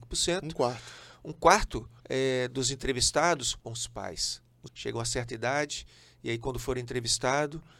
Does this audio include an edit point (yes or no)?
yes